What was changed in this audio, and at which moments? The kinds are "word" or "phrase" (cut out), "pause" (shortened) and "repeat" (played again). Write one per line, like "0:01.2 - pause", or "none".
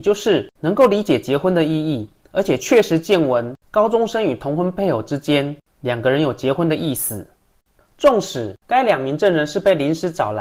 0:07.8 - phrase